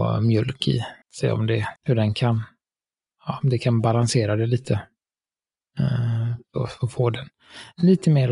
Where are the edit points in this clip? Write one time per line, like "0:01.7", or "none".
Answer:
0:01.0
0:01.8
0:03.0